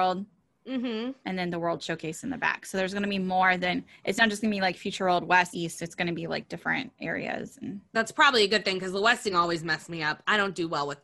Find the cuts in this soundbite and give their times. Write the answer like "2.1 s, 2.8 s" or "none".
5.5 s, 9.3 s